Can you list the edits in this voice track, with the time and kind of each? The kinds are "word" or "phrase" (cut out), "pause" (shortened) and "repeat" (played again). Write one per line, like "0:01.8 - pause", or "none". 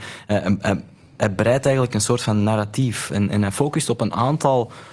none